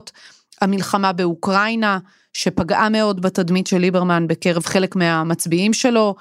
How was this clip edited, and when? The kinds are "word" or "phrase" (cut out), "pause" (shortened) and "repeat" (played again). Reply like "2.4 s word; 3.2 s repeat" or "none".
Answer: none